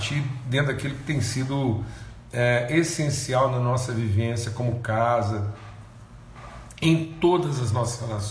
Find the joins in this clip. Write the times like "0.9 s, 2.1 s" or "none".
none